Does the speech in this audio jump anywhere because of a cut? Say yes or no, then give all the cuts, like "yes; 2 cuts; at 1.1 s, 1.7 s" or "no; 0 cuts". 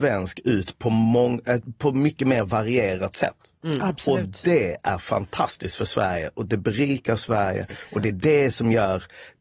no; 0 cuts